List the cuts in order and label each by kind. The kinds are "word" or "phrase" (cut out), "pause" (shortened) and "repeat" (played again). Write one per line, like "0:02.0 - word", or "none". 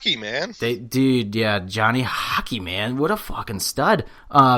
none